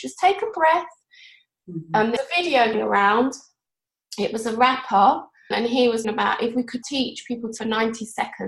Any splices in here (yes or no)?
yes